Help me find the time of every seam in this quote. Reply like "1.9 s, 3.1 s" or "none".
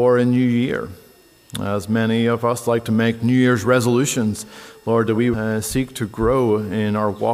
5.3 s